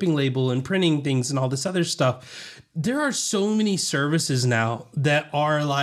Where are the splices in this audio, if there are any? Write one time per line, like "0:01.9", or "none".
none